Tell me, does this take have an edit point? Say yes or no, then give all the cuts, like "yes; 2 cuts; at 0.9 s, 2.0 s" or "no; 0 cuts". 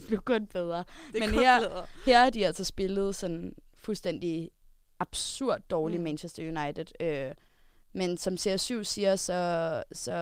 no; 0 cuts